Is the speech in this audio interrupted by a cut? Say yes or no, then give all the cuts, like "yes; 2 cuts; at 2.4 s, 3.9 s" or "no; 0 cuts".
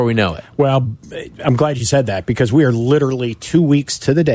no; 0 cuts